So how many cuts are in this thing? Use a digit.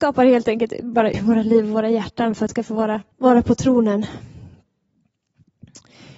3